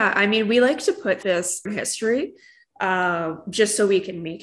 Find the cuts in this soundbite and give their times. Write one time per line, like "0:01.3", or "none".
0:01.2
0:01.7